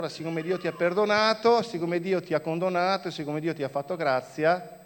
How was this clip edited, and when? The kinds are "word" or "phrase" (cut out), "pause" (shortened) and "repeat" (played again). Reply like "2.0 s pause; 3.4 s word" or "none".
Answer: none